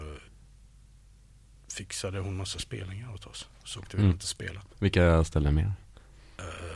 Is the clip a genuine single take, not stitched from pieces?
no; 1 cut; at 4.7 s

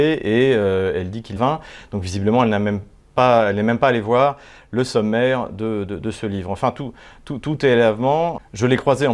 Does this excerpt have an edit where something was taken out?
yes; 1 cut; at 1.4 s

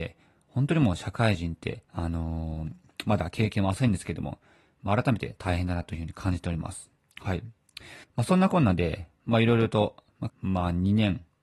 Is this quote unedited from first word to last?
no; 4 cuts; at 1.8 s, 7.1 s, 8.0 s, 10.3 s

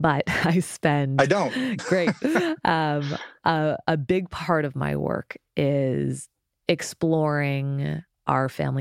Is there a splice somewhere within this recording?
no; 0 cuts

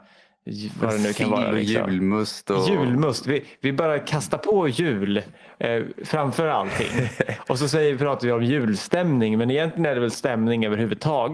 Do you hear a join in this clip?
no; 0 cuts

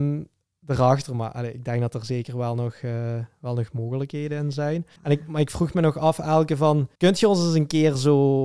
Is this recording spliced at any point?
yes; 2 cuts; at 5.0 s, 6.9 s

